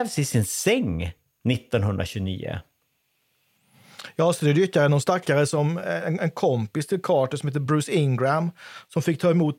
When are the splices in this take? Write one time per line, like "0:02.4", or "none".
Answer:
none